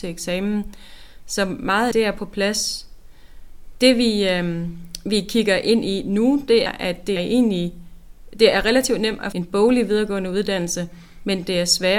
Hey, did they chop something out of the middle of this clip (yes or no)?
yes